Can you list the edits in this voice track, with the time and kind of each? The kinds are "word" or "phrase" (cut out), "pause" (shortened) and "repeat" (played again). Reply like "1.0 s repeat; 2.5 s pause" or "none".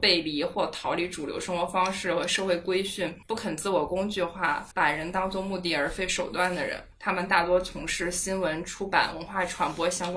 3.2 s pause; 4.7 s pause; 6.9 s pause